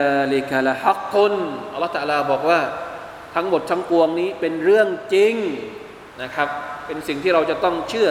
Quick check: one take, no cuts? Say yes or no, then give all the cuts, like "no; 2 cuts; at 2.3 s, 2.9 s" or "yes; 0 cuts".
no; 1 cut; at 6.1 s